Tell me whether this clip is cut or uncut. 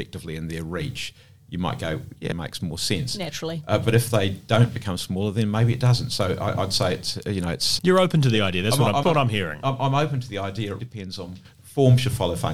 cut